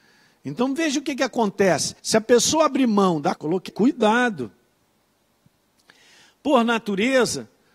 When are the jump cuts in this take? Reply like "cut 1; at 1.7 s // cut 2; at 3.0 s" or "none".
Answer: cut 1; at 2.0 s // cut 2; at 3.4 s // cut 3; at 3.7 s